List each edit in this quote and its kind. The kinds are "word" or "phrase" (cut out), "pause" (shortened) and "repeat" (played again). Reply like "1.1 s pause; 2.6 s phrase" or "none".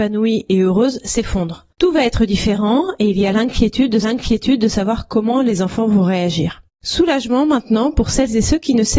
1.7 s pause; 4.0 s repeat; 6.7 s pause